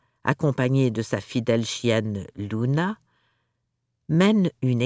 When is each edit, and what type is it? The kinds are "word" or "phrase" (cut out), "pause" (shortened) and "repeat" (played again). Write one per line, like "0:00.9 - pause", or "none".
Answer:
none